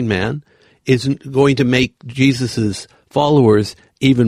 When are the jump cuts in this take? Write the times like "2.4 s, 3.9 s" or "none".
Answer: none